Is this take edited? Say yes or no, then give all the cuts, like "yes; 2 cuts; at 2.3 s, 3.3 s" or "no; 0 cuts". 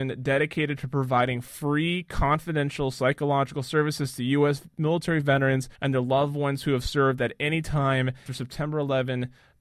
yes; 2 cuts; at 5.7 s, 8.3 s